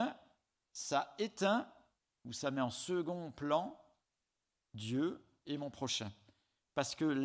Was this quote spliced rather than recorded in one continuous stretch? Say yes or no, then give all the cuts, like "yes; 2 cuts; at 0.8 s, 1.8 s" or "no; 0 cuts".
yes; 1 cut; at 2.0 s